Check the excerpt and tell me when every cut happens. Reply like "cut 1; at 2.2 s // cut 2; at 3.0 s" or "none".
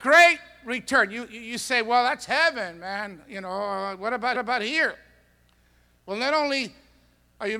cut 1; at 4.3 s